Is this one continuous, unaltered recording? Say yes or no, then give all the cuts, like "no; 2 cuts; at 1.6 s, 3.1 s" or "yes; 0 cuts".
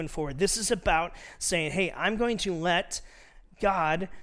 yes; 0 cuts